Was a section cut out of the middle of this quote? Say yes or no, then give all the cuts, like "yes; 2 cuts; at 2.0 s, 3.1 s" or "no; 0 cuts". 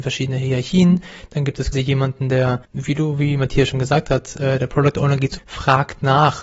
yes; 3 cuts; at 1.7 s, 2.6 s, 5.4 s